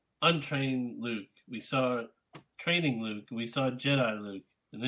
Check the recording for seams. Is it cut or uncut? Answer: uncut